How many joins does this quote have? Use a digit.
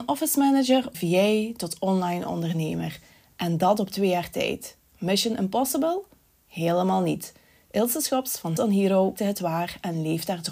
3